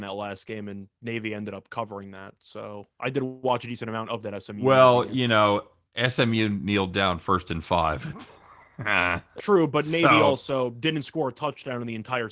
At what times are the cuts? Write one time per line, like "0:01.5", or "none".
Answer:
0:09.4